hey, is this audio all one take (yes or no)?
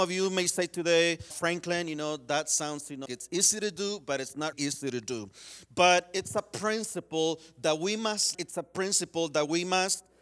no